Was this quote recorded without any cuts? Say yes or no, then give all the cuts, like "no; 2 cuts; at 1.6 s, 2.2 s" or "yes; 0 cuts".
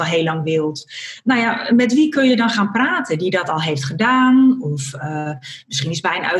yes; 0 cuts